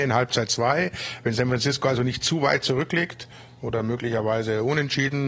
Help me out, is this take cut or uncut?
uncut